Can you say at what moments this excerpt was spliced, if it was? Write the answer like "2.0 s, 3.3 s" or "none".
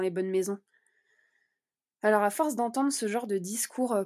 none